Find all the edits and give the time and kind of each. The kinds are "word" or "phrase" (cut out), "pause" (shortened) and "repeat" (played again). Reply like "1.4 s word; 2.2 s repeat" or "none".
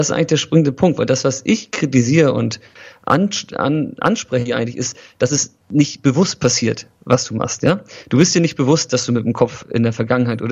5.6 s pause